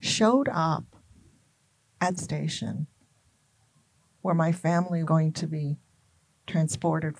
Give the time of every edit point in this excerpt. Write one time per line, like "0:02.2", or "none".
0:02.2
0:05.0

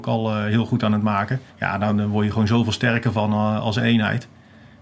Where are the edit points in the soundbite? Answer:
0:01.5

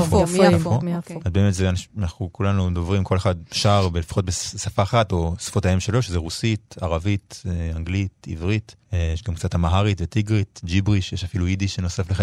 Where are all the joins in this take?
0:08.8

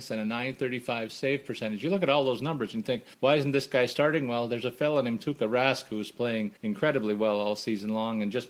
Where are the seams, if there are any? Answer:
0:03.1
0:06.6

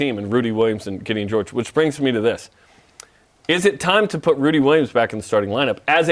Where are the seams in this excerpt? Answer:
none

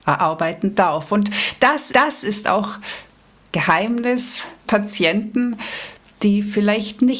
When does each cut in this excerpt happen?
0:01.9
0:03.5
0:04.7

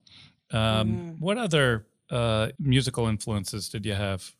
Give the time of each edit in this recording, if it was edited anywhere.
0:02.6

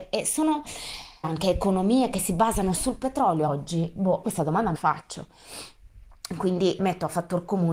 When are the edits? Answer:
0:01.2
0:02.8
0:03.5
0:04.2
0:04.7
0:06.8

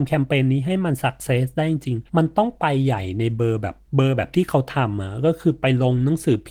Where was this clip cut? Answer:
0:02.1
0:03.8

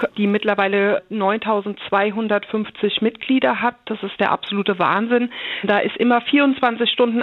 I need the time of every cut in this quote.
none

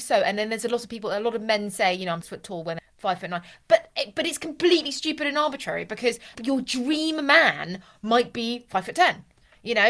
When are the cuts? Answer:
0:02.2
0:02.8
0:06.3

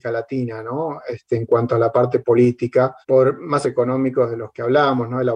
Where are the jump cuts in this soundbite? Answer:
0:03.0
0:03.6

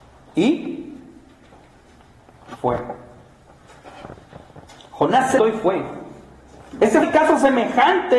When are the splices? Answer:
0:05.4
0:07.0

